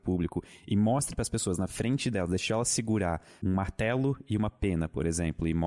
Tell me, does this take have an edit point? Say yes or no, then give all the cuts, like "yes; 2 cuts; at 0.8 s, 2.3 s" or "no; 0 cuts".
no; 0 cuts